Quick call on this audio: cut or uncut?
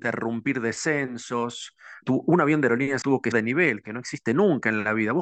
cut